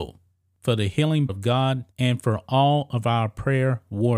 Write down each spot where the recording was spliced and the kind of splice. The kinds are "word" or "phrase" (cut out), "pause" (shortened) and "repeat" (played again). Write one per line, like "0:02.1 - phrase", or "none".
0:01.3 - word
0:01.9 - pause